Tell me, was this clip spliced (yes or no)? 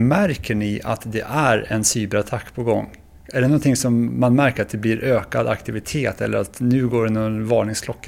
no